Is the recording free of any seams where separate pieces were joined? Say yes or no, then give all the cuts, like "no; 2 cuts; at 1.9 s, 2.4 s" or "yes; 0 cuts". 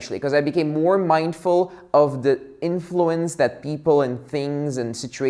yes; 0 cuts